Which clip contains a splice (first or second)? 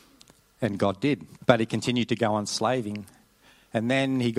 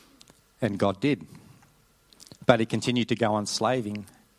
first